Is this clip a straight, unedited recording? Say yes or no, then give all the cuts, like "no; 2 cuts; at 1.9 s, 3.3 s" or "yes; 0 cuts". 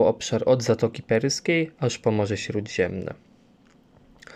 yes; 0 cuts